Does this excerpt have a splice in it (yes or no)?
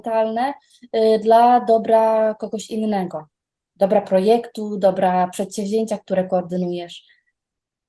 no